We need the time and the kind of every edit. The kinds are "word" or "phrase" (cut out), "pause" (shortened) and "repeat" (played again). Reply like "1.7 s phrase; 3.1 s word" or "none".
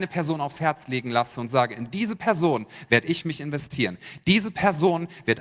none